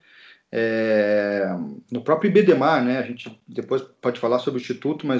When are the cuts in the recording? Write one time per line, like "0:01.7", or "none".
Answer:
0:04.0